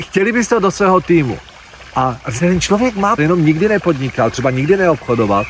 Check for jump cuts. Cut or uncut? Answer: cut